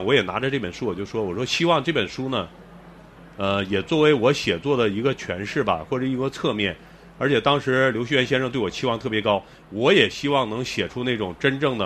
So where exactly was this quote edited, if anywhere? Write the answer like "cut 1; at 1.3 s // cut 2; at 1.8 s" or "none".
none